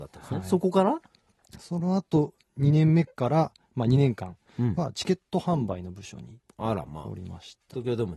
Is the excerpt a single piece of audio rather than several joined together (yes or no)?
yes